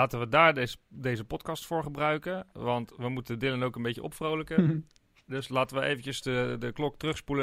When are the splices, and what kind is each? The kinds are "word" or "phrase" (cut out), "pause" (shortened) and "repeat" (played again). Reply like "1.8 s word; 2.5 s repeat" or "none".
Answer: none